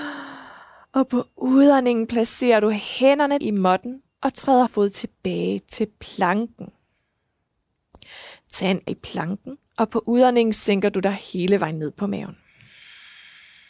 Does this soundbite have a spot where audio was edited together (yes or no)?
yes